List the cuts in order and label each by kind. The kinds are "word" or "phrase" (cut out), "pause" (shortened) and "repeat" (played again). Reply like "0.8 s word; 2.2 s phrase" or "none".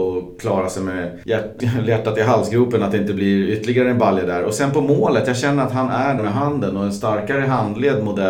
1.6 s word; 6.2 s word